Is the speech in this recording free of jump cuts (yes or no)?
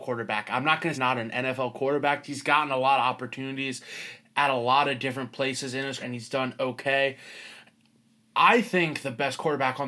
no